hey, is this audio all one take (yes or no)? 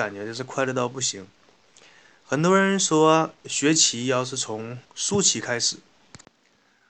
no